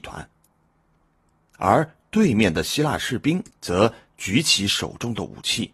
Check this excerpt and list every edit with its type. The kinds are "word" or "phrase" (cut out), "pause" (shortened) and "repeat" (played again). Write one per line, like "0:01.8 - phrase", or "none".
0:03.5 - pause